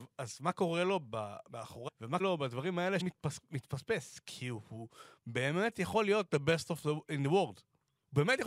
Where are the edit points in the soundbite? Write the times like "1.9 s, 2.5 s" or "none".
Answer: 1.9 s, 2.2 s, 3.0 s